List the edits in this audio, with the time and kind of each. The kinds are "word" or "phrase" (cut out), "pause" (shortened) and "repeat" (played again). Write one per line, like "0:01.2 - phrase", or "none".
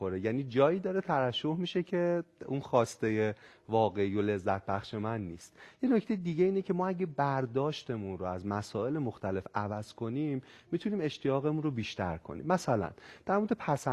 none